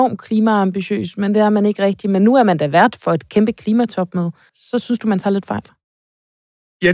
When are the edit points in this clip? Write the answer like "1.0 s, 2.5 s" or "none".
none